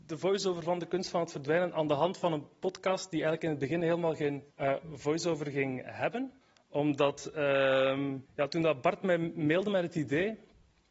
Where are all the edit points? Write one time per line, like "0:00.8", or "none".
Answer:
0:04.5
0:06.4
0:08.3